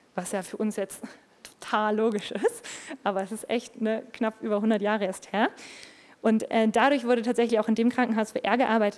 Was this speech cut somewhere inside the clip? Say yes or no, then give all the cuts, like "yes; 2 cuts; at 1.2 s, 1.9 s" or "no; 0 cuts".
no; 0 cuts